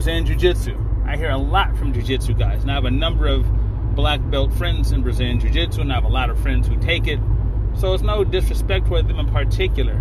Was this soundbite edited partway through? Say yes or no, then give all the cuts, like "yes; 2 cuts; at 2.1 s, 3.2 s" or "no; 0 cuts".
no; 0 cuts